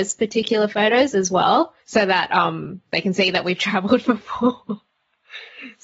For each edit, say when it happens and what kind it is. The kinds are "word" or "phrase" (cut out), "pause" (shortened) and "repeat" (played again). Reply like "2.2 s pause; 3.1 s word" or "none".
1.8 s pause